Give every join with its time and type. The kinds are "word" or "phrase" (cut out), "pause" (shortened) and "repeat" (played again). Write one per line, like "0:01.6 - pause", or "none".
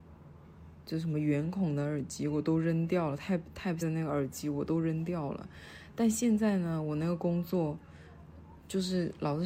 0:03.8 - word